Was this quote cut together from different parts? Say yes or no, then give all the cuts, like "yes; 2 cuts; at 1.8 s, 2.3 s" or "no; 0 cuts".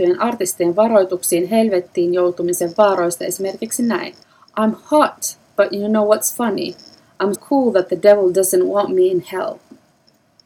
yes; 2 cuts; at 4.2 s, 7.3 s